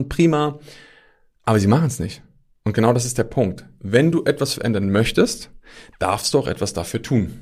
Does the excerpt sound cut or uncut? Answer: uncut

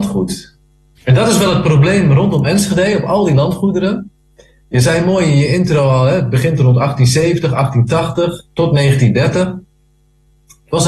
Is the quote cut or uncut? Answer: uncut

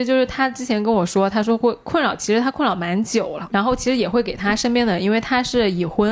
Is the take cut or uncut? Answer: cut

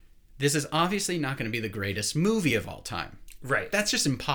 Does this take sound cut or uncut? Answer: uncut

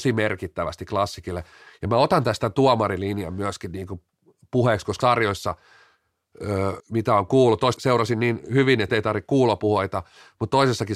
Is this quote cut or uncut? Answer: cut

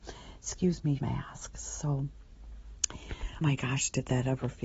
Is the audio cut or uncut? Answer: cut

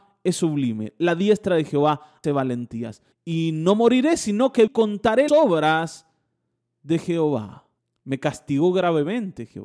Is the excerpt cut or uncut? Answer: cut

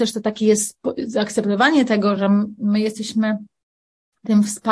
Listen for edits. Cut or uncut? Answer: uncut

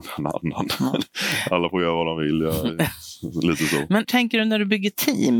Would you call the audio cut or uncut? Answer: cut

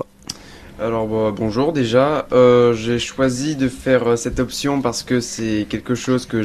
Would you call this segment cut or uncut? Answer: uncut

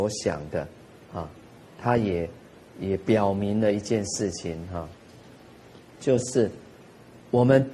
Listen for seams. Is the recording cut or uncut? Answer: uncut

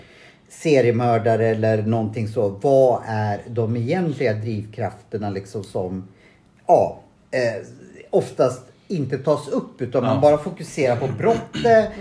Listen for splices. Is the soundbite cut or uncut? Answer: cut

